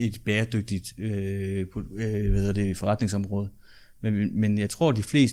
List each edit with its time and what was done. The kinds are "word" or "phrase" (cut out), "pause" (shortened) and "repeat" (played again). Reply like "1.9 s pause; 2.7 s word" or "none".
none